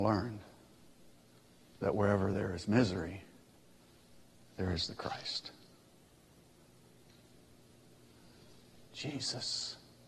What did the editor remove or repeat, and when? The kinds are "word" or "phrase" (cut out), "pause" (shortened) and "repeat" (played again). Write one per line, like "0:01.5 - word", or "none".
none